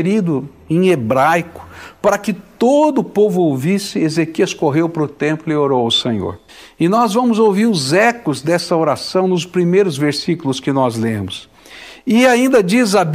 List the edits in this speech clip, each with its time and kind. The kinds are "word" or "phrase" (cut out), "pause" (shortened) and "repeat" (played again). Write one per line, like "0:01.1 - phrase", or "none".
0:06.5 - pause